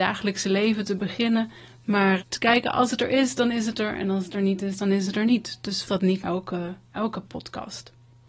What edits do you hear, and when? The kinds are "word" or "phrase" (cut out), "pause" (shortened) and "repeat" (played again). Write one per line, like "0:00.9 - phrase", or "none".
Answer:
0:02.2 - word
0:05.8 - word
0:06.2 - word